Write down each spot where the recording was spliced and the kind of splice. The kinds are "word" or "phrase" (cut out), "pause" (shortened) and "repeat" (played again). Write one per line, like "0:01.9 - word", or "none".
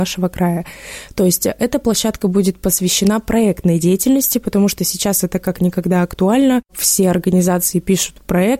none